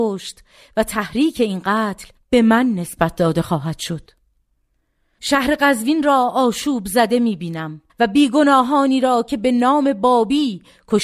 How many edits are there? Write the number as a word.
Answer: two